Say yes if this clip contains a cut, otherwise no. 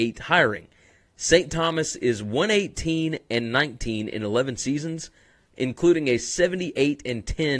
no